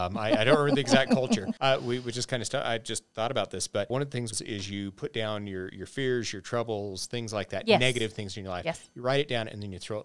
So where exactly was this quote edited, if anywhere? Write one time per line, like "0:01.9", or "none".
none